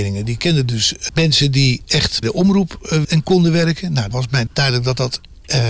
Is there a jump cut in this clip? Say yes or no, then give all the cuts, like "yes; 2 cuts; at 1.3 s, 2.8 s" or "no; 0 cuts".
yes; 5 cuts; at 1.1 s, 2.2 s, 3.0 s, 4.1 s, 4.5 s